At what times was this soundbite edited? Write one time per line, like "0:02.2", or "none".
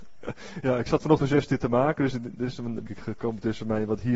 0:01.2
0:02.9